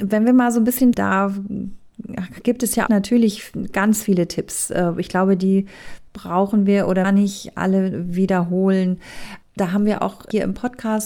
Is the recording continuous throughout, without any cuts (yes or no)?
no